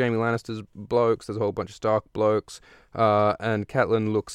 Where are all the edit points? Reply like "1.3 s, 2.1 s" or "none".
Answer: none